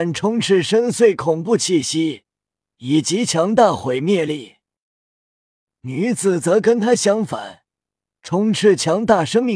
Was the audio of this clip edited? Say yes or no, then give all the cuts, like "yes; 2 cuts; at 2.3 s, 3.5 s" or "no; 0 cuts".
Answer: no; 0 cuts